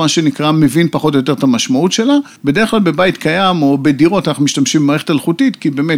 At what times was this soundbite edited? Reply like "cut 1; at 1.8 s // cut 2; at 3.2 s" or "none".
cut 1; at 2.4 s

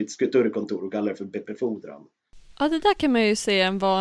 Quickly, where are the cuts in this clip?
cut 1; at 1.4 s

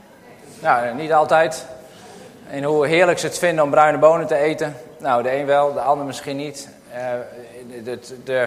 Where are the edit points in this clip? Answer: none

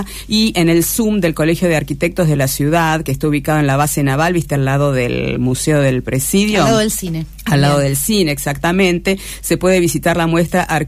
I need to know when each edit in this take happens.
none

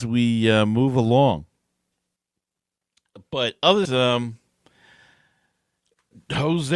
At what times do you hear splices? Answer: cut 1; at 3.8 s

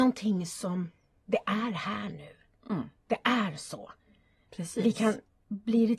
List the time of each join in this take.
none

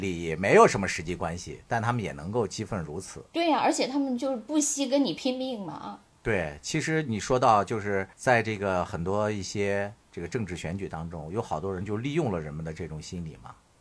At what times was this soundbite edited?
cut 1; at 8.1 s

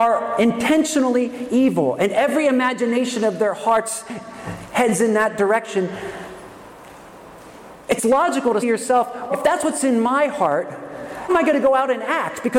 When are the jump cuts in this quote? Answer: cut 1; at 8.6 s // cut 2; at 9.3 s // cut 3; at 11.3 s

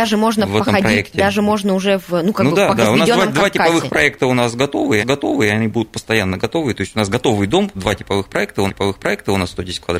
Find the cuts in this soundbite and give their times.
cut 1; at 2.8 s // cut 2; at 5.0 s // cut 3; at 7.7 s // cut 4; at 8.7 s

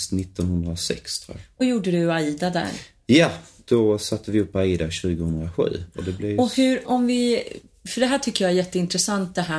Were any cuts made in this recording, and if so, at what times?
cut 1; at 1.6 s // cut 2; at 6.8 s

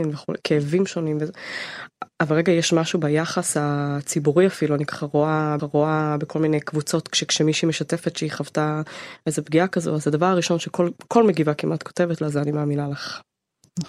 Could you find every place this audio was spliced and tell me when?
cut 1; at 5.6 s

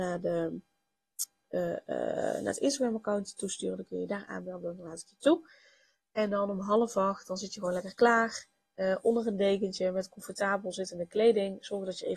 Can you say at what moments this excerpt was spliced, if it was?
none

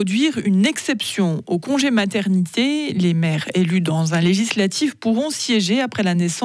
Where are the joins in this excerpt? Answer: none

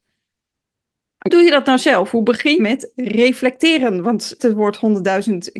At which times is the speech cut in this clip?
cut 1; at 1.3 s // cut 2; at 2.6 s // cut 3; at 4.4 s

